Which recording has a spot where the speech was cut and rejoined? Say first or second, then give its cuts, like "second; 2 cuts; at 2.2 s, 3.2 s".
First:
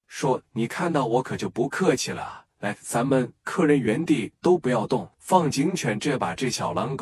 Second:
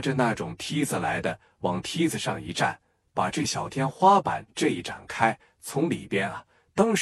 first; 2 cuts; at 2.5 s, 5.1 s